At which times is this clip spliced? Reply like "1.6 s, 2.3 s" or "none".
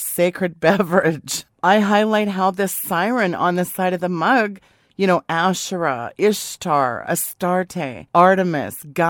none